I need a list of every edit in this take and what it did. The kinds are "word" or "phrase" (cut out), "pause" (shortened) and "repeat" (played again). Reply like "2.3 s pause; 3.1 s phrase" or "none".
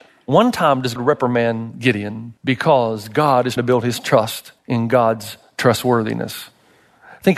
1.0 s word; 2.4 s pause; 3.6 s word; 4.6 s pause